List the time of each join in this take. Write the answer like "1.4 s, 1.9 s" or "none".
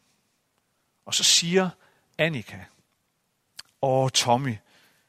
none